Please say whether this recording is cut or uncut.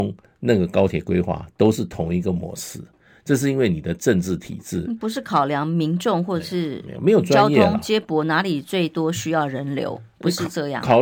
uncut